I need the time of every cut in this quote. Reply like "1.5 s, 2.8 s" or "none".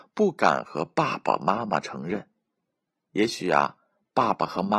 none